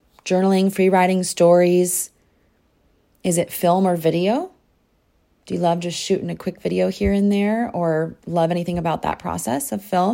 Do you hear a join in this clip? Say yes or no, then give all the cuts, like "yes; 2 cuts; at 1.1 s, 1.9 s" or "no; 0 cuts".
no; 0 cuts